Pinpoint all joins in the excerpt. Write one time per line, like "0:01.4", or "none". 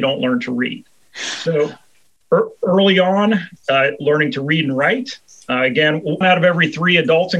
0:06.2

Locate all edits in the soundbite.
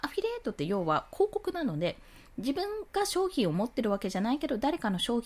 0:02.9

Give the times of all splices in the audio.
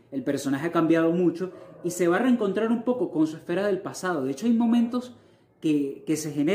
none

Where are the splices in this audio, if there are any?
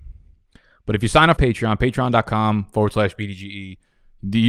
0:01.4

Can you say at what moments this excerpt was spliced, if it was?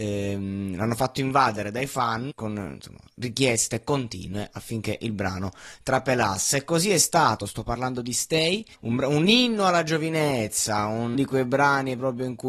0:02.3
0:08.7
0:11.1

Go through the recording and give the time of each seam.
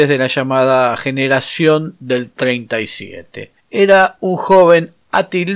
none

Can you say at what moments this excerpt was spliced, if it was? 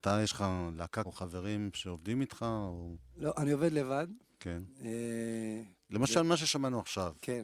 0:01.0

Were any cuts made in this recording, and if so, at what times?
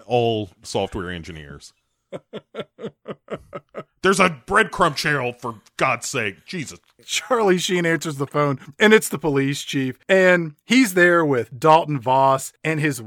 none

